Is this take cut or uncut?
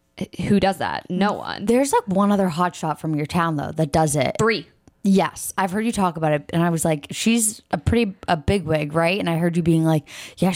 uncut